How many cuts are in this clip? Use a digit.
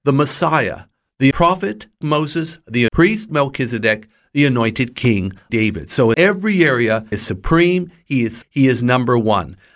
8